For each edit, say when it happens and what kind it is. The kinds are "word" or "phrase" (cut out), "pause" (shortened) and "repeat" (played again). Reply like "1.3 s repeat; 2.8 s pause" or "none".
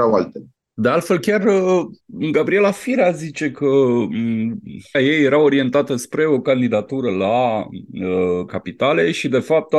2.0 s pause; 4.9 s word; 8.5 s word